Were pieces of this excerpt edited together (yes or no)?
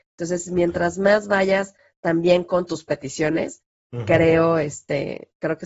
no